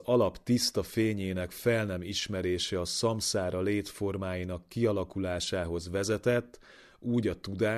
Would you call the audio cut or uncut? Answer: uncut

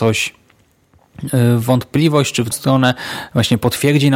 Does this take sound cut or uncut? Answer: cut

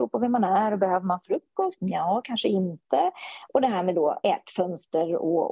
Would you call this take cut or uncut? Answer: cut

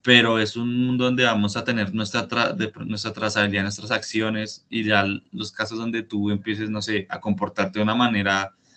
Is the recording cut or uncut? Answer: uncut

